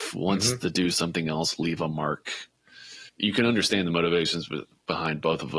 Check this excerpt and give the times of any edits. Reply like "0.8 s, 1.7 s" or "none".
3.1 s

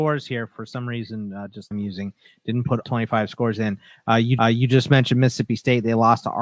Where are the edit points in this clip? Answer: 1.7 s, 2.8 s, 4.4 s

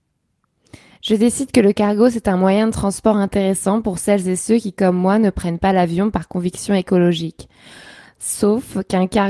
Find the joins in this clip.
none

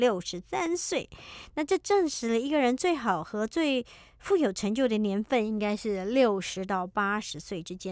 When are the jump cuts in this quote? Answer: none

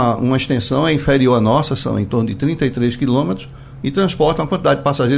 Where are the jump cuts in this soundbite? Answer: none

